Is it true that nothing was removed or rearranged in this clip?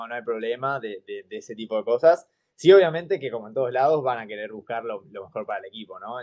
yes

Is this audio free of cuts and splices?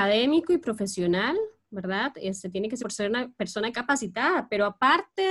no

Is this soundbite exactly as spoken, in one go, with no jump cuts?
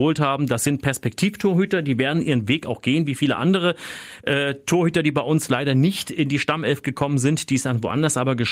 yes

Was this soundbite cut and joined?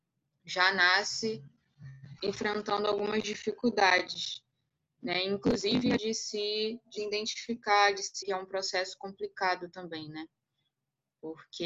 yes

